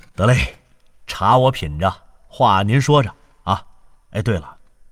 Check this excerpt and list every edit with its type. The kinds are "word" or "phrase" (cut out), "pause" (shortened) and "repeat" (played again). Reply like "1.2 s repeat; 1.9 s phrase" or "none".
none

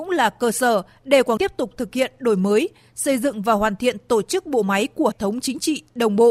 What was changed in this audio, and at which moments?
1.4 s word; 5.1 s word

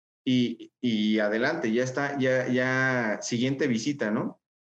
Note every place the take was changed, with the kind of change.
none

